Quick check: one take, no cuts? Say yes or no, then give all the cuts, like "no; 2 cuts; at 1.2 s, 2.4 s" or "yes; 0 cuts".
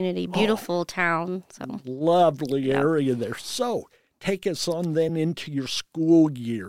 yes; 0 cuts